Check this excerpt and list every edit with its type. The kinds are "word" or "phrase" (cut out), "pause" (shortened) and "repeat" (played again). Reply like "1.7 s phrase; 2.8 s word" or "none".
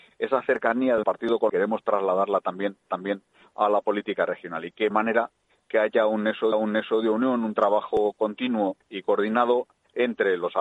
1.0 s word; 1.5 s phrase; 2.9 s repeat; 4.9 s word; 6.5 s repeat; 8.8 s pause